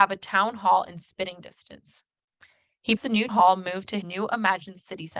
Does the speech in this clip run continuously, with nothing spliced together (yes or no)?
no